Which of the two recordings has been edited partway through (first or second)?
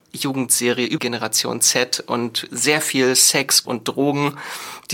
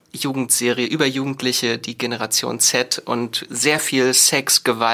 first